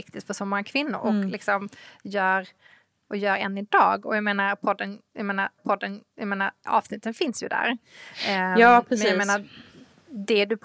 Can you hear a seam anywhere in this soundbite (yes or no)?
yes